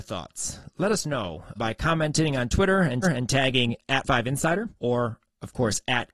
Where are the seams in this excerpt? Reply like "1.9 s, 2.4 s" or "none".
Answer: 1.6 s, 3.0 s, 4.0 s, 4.8 s